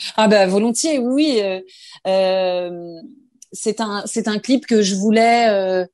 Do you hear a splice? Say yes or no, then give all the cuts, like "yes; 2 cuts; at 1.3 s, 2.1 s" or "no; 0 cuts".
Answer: no; 0 cuts